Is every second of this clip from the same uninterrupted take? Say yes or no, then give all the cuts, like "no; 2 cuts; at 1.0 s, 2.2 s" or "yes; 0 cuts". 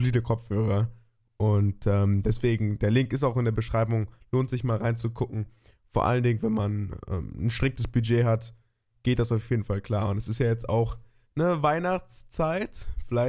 yes; 0 cuts